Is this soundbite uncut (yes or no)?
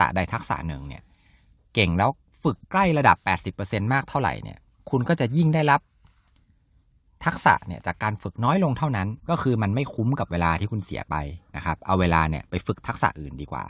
no